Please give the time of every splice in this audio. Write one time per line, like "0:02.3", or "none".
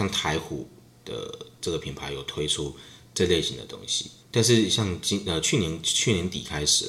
0:04.2